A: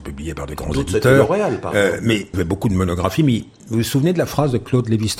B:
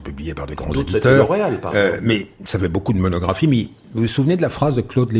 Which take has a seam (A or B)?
A